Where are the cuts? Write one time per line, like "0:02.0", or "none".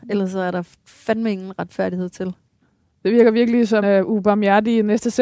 0:02.5
0:03.8